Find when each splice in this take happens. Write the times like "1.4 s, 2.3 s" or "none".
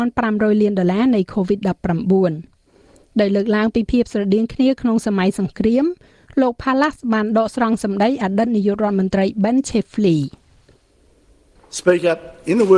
none